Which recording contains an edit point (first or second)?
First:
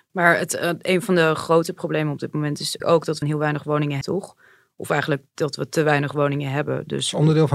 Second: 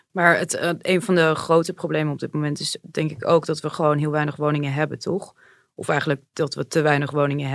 first